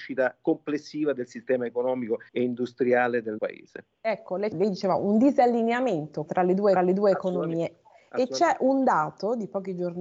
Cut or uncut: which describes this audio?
cut